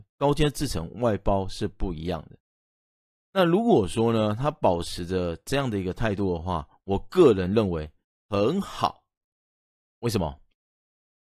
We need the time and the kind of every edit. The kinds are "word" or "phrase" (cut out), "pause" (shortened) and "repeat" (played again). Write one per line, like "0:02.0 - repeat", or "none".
none